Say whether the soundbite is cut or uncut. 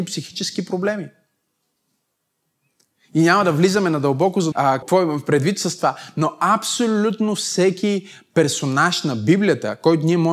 cut